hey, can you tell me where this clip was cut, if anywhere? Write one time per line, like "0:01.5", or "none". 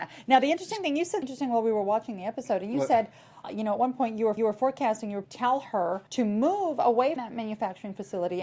0:01.2
0:03.4
0:04.4
0:05.2
0:06.1
0:07.2